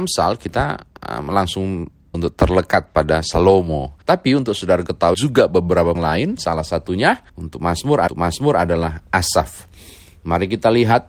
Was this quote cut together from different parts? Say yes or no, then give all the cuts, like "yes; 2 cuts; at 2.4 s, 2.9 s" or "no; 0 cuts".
yes; 6 cuts; at 2.1 s, 4.0 s, 5.1 s, 5.9 s, 7.3 s, 8.1 s